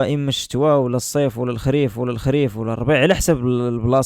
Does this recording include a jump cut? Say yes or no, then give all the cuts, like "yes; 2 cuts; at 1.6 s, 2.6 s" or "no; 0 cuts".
yes; 1 cut; at 1.9 s